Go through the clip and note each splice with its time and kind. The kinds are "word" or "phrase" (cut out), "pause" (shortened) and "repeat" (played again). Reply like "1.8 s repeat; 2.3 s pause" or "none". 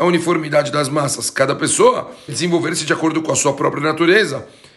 2.3 s word